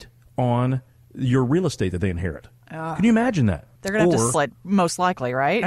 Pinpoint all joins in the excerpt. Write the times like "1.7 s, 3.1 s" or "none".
4.3 s